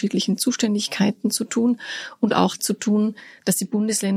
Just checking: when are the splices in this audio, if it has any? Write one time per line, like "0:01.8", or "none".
0:02.6

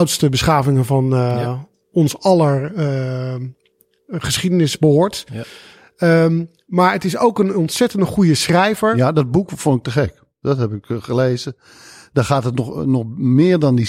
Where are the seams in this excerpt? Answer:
none

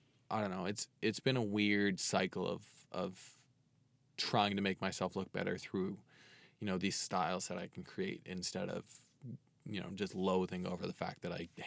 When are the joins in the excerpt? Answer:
none

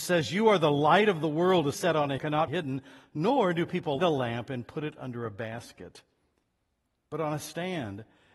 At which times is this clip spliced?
0:01.7
0:02.2
0:02.5
0:04.0

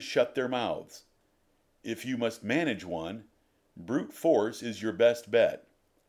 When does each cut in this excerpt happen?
none

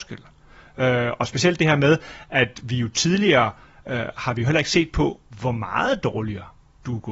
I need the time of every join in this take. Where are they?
none

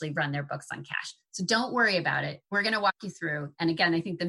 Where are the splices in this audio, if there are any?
0:02.4

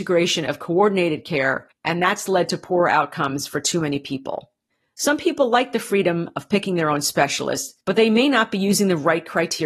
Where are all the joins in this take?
0:01.7
0:04.7
0:07.8

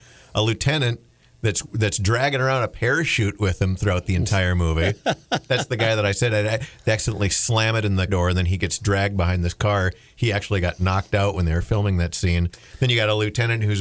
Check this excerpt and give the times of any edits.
0:08.1

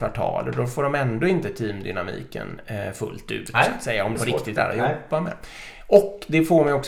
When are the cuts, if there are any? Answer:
0:04.1
0:04.6

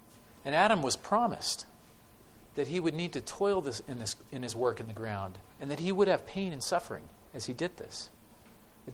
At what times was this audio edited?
0:05.5

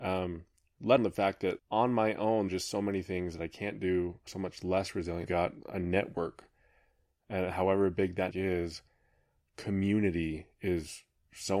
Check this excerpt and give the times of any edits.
0:01.0
0:01.6
0:02.5
0:04.3
0:05.3
0:08.3

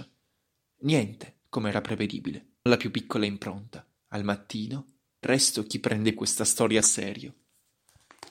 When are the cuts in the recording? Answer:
0:02.7
0:04.0
0:05.2
0:06.1
0:06.8

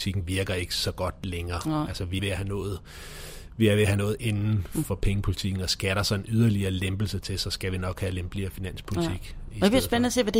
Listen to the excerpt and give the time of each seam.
0:02.2
0:04.8

